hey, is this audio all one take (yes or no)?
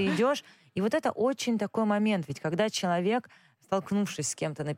yes